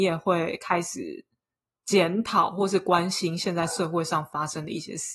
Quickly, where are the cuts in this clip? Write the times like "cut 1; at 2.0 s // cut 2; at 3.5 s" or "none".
none